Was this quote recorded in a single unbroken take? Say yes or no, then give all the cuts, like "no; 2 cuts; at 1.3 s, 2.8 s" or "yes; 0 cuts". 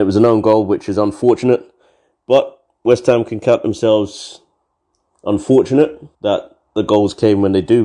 no; 1 cut; at 6.1 s